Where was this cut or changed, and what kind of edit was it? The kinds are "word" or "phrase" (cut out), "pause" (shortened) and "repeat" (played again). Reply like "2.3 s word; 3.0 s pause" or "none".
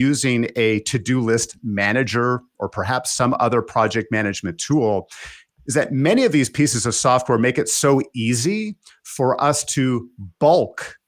none